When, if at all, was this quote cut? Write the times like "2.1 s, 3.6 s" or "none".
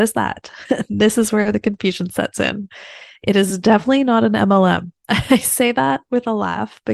5.0 s

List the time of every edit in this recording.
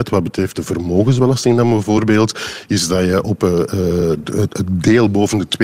none

